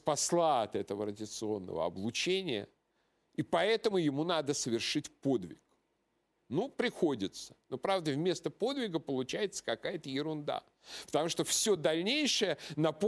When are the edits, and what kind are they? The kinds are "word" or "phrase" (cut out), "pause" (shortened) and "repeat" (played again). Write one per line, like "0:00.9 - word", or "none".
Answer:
none